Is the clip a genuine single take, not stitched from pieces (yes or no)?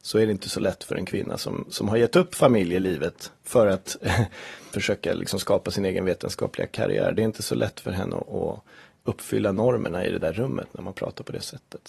yes